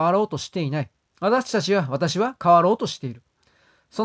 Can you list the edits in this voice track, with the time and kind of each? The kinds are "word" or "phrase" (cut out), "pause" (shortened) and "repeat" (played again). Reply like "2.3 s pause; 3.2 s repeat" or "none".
1.1 s pause